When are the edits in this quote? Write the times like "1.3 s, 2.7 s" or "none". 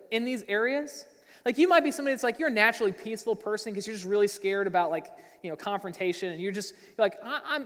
none